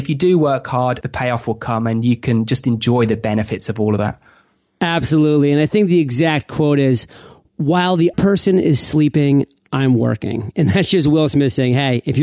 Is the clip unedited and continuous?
no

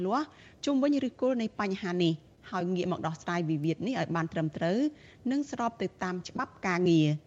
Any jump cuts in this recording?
no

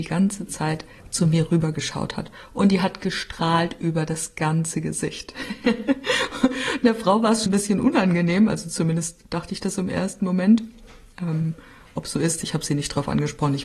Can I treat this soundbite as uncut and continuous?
no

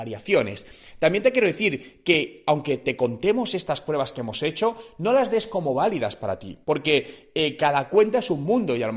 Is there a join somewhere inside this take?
yes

